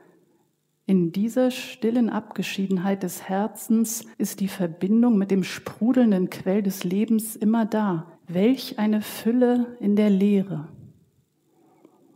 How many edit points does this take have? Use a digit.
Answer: 2